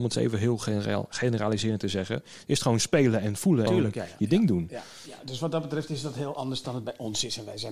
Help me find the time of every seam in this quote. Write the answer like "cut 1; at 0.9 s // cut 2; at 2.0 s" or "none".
cut 1; at 3.7 s

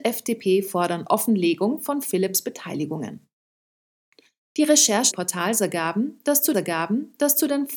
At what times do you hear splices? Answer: cut 1; at 5.1 s // cut 2; at 6.5 s

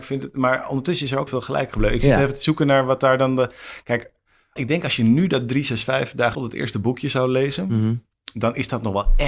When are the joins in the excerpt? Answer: cut 1; at 1.3 s // cut 2; at 4.6 s // cut 3; at 6.3 s

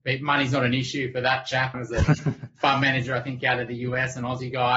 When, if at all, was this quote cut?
cut 1; at 1.7 s

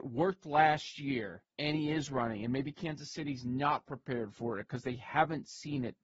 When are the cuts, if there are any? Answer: cut 1; at 1.5 s

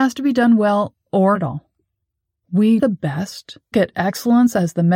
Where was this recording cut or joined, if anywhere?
cut 1; at 1.3 s // cut 2; at 2.8 s // cut 3; at 3.7 s

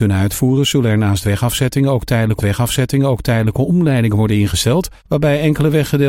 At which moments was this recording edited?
cut 1; at 2.4 s // cut 2; at 5.0 s

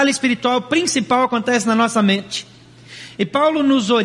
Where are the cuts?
none

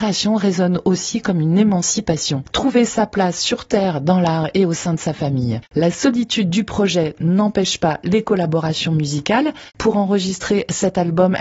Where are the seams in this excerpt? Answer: cut 1; at 5.7 s // cut 2; at 9.7 s

